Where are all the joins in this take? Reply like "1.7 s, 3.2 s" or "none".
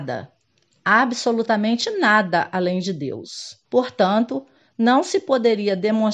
3.6 s